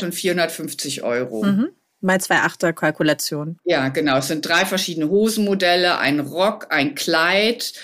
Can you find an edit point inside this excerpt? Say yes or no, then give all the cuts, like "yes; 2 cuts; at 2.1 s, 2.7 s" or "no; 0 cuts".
no; 0 cuts